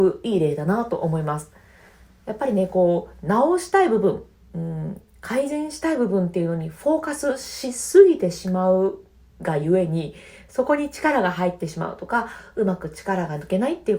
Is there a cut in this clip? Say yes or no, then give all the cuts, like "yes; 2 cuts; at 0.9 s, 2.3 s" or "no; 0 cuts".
no; 0 cuts